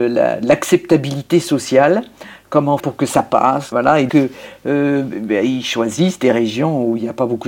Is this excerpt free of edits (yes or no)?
no